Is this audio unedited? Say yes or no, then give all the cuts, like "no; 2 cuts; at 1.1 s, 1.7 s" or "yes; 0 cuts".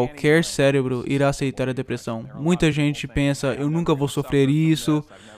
yes; 0 cuts